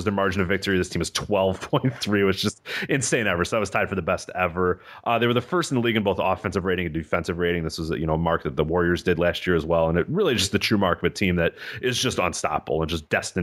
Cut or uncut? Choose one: uncut